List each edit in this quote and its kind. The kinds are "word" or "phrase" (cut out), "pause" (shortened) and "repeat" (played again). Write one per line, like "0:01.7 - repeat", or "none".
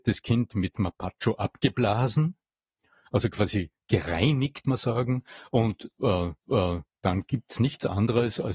0:04.6 - word
0:06.4 - repeat